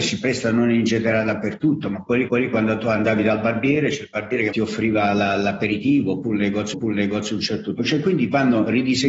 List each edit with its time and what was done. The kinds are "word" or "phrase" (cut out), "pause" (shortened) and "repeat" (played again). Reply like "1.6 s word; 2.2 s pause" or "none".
2.3 s repeat; 4.5 s phrase; 6.7 s repeat; 7.8 s word